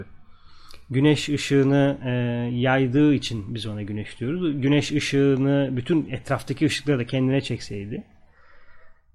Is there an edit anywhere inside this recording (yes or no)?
no